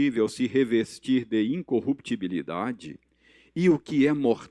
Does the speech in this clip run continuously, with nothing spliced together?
yes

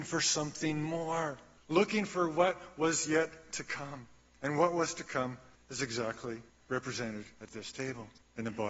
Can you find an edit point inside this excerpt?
yes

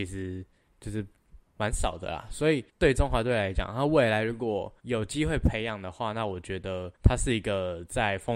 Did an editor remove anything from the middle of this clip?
yes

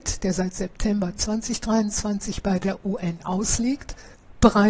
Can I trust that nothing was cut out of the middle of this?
yes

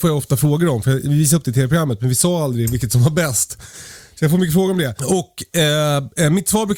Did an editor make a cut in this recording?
no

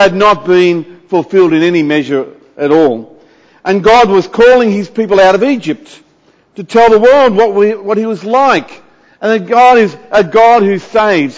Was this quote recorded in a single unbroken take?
yes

